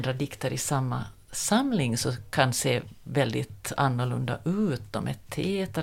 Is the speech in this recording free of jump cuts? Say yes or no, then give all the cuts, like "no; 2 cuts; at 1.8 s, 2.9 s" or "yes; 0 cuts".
yes; 0 cuts